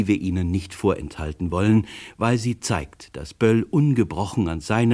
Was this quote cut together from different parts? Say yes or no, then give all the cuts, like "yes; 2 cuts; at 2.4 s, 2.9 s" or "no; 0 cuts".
no; 0 cuts